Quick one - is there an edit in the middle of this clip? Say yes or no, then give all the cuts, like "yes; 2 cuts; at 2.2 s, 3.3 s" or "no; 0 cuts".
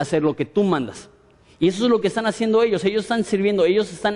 no; 0 cuts